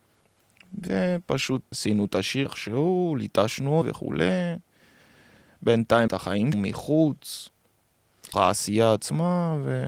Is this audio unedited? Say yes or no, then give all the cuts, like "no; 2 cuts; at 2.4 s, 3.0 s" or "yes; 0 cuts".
no; 6 cuts; at 1.7 s, 2.5 s, 3.8 s, 6.1 s, 6.5 s, 8.3 s